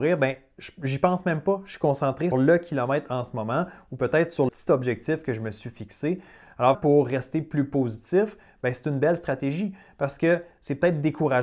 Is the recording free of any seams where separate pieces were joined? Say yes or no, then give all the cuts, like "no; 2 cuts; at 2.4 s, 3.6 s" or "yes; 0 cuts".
no; 3 cuts; at 2.3 s, 4.5 s, 6.7 s